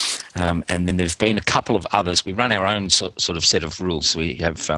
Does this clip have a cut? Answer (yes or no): no